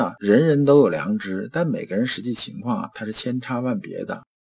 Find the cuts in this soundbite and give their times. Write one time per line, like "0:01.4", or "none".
none